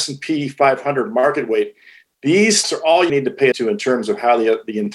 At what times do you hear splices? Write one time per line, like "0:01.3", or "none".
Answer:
0:02.6
0:03.1
0:03.5